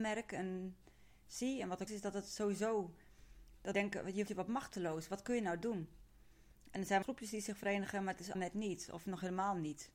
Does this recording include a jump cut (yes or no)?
yes